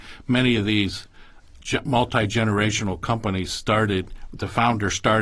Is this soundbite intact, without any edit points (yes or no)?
yes